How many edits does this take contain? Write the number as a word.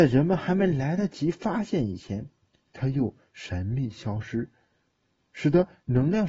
zero